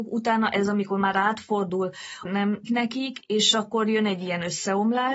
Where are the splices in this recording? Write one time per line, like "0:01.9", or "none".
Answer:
0:02.2
0:02.7

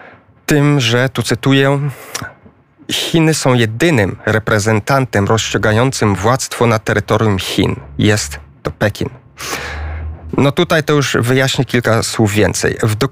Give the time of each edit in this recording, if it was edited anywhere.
none

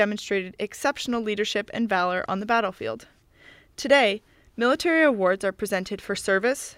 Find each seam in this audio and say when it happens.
none

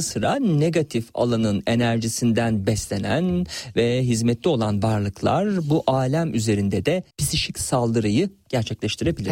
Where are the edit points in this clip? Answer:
0:07.1

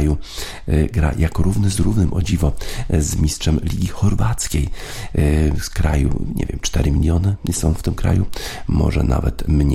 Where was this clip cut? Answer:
none

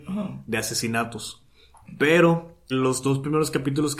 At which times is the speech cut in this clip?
0:02.7

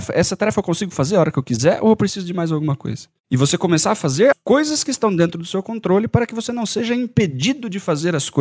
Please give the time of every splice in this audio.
0:04.3

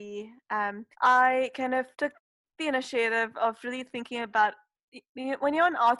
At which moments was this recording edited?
0:00.9
0:01.9

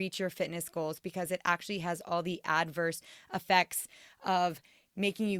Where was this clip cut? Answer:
none

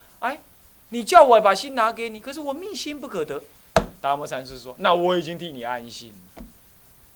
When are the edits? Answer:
none

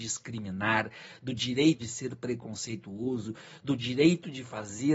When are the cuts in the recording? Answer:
0:01.8

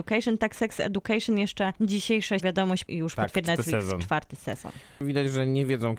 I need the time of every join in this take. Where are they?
0:02.4
0:03.5

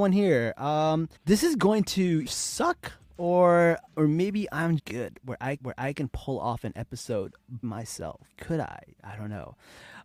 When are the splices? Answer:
0:01.2
0:02.3
0:03.9
0:04.8
0:05.6
0:07.6
0:08.3

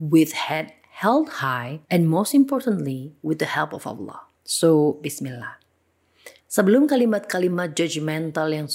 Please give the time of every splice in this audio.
0:01.8
0:04.3
0:06.4

